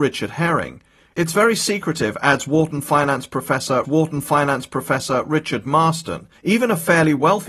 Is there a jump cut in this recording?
yes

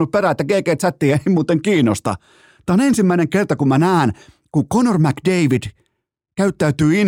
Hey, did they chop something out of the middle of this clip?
no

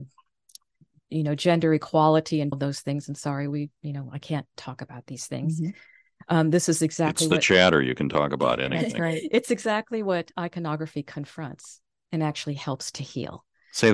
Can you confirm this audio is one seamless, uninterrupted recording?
no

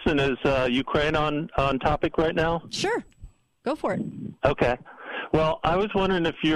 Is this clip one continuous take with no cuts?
yes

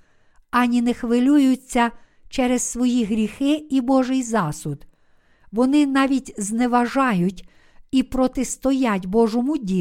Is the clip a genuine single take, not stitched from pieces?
yes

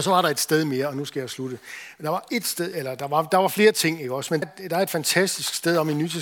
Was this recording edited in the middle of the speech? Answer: yes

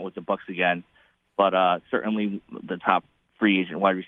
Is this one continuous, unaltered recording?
yes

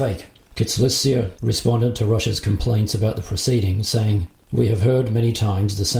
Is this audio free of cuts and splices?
yes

